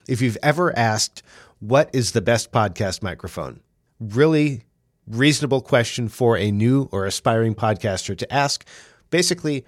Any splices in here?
no; 0 cuts

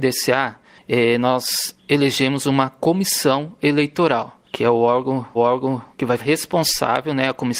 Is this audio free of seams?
no; 4 cuts; at 1.8 s, 4.5 s, 5.4 s, 6.2 s

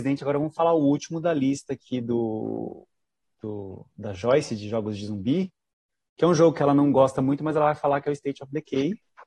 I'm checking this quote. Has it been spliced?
no; 0 cuts

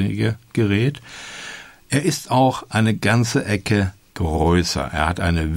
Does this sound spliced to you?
no; 0 cuts

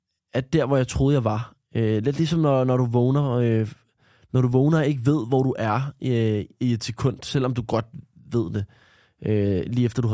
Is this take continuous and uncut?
yes; 0 cuts

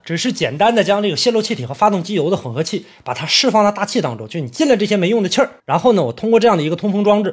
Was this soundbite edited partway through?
yes; 1 cut; at 5.6 s

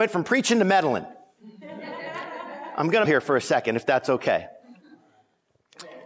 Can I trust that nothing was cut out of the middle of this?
no; 1 cut; at 3.1 s

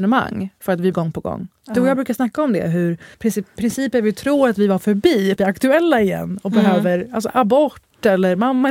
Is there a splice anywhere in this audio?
yes; 3 cuts; at 0.9 s, 3.1 s, 5.4 s

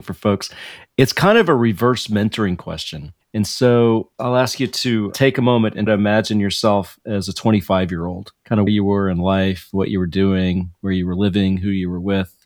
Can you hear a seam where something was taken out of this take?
yes; 5 cuts; at 3.2 s, 4.1 s, 5.9 s, 8.3 s, 8.7 s

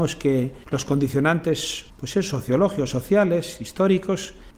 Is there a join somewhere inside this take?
no; 0 cuts

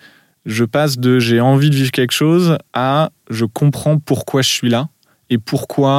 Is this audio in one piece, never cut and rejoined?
no; 1 cut; at 2.7 s

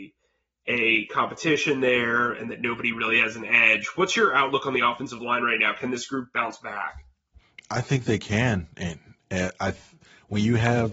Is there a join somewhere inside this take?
no; 0 cuts

